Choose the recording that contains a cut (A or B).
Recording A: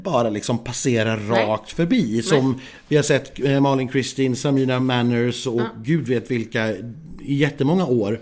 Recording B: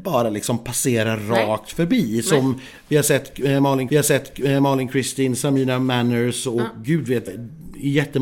B